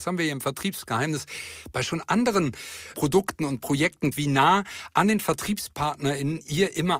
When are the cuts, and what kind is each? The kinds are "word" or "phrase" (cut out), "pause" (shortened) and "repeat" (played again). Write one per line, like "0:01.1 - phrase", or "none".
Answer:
0:02.9 - word
0:04.1 - word